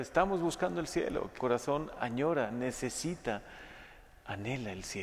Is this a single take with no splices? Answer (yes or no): no